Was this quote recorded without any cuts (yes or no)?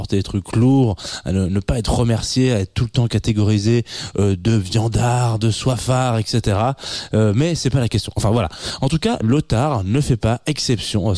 yes